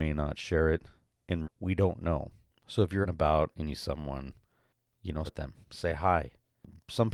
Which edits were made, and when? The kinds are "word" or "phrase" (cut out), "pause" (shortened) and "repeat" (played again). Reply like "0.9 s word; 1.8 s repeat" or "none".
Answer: 1.4 s word; 3.0 s word; 3.8 s word; 5.3 s word; 5.6 s pause